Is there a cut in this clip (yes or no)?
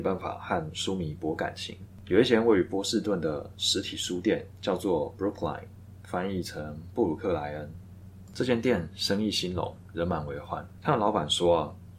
no